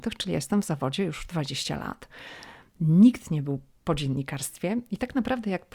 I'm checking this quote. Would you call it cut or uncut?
uncut